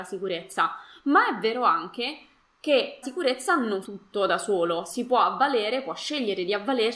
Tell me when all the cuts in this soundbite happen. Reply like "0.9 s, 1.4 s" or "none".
3.0 s, 3.8 s